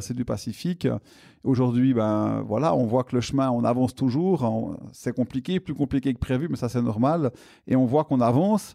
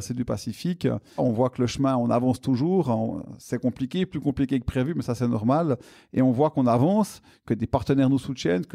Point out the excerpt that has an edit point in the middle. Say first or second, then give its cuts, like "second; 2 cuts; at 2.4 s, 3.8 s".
second; 1 cut; at 1.2 s